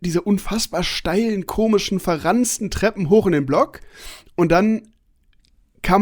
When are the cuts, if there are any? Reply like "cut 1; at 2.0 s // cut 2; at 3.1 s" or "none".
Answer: none